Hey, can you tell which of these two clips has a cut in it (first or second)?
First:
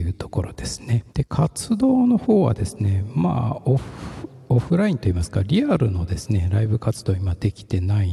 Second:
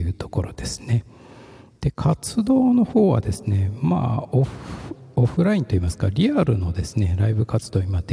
first